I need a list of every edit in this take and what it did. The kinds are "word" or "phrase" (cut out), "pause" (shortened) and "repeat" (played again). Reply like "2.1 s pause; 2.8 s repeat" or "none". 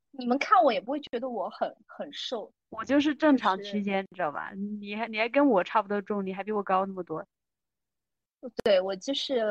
2.6 s pause